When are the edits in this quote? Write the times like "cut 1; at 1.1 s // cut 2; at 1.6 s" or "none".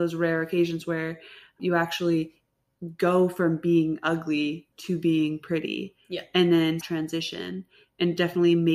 cut 1; at 1.6 s // cut 2; at 4.7 s // cut 3; at 6.8 s